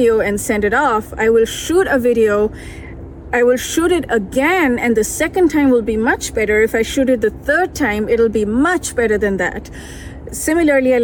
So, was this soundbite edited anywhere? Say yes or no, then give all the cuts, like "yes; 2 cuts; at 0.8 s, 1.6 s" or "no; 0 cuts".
no; 0 cuts